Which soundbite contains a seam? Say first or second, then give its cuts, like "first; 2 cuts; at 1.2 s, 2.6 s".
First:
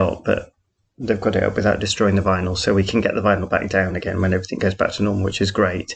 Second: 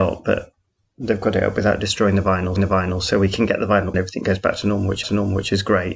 second; 3 cuts; at 2.6 s, 3.9 s, 5.0 s